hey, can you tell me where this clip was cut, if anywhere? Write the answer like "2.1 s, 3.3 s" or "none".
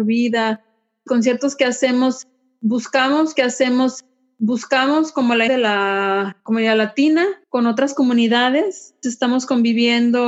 1.1 s, 3.4 s, 5.5 s, 6.4 s, 7.4 s, 9.0 s